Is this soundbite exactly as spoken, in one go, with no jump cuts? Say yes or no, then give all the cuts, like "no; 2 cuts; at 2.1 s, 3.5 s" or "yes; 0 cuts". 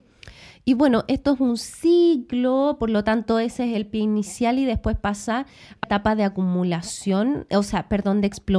no; 1 cut; at 5.8 s